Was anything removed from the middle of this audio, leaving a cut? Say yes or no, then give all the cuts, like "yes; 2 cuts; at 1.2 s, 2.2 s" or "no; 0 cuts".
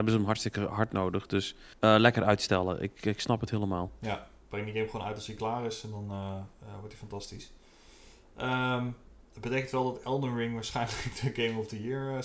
yes; 1 cut; at 1.8 s